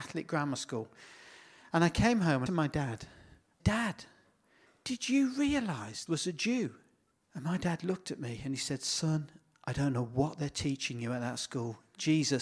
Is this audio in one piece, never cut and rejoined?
no; 4 cuts; at 2.5 s, 3.6 s, 6.1 s, 7.1 s

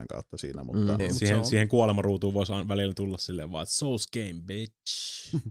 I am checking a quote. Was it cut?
yes; 1 cut; at 1.0 s

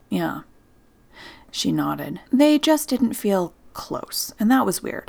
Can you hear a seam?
yes; 1 cut; at 2.2 s

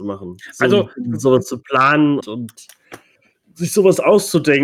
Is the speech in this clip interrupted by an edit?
yes; 1 cut; at 2.2 s

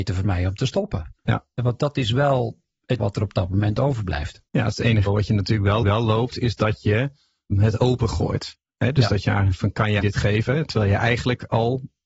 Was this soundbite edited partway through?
yes; 6 cuts; at 3.0 s, 4.5 s, 5.1 s, 5.8 s, 7.5 s, 10.0 s

